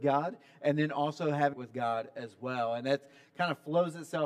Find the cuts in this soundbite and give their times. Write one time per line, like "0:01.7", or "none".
0:01.5